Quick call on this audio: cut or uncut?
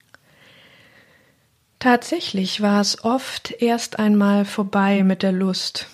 uncut